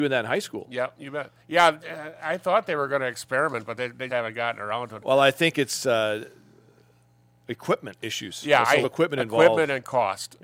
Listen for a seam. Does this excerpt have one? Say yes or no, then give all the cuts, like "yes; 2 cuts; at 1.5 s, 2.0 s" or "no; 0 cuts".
yes; 3 cuts; at 1.4 s, 4.1 s, 8.8 s